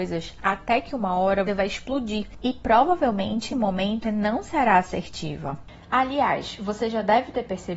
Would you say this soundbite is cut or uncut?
cut